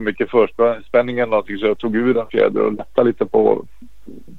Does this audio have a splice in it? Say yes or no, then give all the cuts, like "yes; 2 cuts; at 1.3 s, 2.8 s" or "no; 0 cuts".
no; 0 cuts